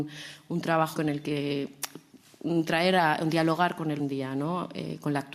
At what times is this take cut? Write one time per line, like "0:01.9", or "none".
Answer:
0:00.9
0:04.0